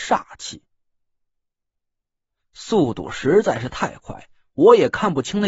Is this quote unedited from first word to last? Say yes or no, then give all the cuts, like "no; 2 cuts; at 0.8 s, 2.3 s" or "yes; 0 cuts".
yes; 0 cuts